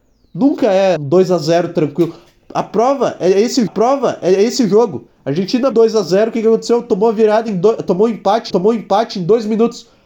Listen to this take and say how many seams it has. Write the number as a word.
four